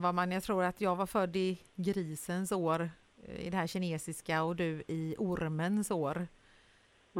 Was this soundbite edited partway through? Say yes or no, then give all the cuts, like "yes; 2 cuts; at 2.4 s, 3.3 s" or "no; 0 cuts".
no; 0 cuts